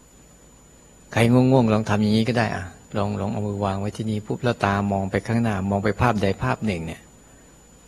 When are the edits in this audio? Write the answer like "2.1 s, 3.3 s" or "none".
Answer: 2.8 s